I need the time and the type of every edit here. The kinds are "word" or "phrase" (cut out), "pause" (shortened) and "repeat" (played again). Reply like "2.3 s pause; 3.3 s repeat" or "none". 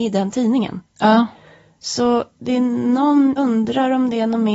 3.4 s word